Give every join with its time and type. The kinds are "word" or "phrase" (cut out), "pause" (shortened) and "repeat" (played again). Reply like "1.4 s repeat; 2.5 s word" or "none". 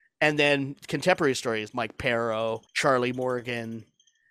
1.7 s word; 2.7 s pause